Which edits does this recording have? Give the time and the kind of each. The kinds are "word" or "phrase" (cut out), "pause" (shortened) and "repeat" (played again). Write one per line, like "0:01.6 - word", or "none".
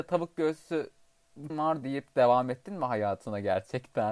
0:01.5 - word
0:01.8 - phrase